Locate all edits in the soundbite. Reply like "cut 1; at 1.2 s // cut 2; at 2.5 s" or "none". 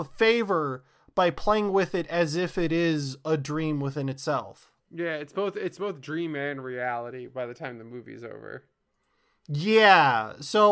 cut 1; at 4.8 s